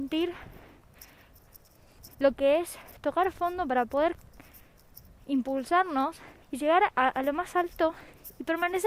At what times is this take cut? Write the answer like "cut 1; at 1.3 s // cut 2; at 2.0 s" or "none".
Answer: cut 1; at 2.1 s // cut 2; at 6.4 s